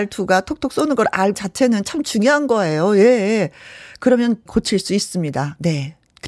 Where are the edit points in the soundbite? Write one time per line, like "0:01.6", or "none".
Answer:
0:01.3
0:04.5